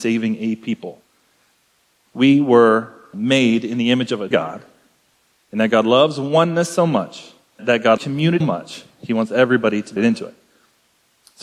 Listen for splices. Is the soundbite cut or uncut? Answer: cut